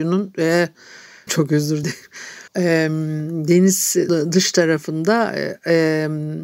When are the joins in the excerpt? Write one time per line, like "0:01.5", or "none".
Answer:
0:01.3
0:01.8
0:02.5
0:04.1